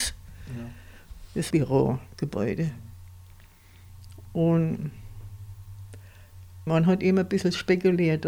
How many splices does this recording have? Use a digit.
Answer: 2